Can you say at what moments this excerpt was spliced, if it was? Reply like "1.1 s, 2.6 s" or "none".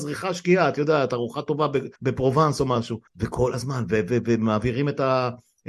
2.0 s, 3.1 s